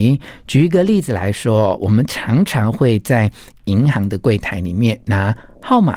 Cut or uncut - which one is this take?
uncut